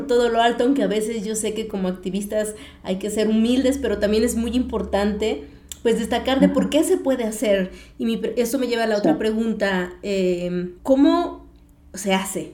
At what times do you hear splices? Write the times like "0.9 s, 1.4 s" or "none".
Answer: 10.8 s